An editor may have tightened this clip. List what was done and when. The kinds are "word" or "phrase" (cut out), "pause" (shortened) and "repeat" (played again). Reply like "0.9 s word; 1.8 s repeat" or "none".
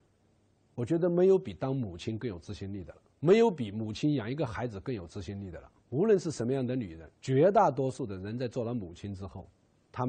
3.1 s pause; 5.8 s pause; 7.1 s pause